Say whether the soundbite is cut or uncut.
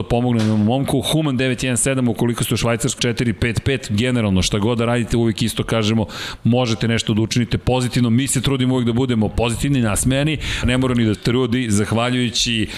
cut